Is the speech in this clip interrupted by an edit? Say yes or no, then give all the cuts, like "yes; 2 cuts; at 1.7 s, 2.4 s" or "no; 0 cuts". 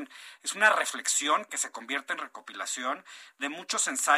no; 0 cuts